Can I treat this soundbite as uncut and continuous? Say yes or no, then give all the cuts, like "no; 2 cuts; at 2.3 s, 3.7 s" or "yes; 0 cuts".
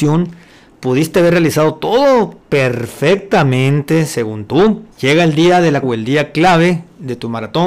no; 3 cuts; at 2.4 s, 4.9 s, 5.8 s